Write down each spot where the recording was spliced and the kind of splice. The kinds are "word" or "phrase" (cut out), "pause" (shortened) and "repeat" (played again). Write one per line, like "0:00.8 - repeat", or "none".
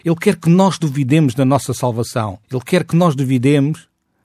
0:02.4 - pause